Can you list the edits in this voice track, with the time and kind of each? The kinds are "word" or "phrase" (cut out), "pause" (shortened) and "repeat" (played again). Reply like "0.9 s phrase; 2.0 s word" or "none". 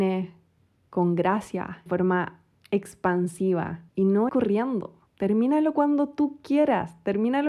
1.9 s phrase; 3.9 s pause; 4.3 s word; 5.1 s pause